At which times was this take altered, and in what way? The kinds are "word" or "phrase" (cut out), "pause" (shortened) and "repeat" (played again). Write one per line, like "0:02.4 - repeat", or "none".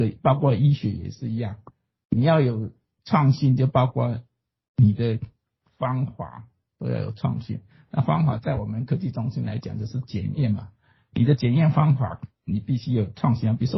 none